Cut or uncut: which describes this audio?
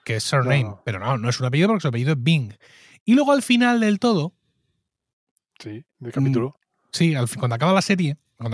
uncut